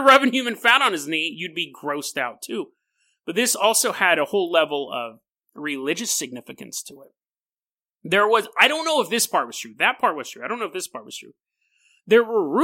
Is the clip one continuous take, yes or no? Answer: yes